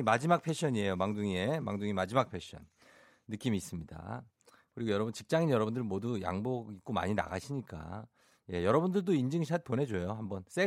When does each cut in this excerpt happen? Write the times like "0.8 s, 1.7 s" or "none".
none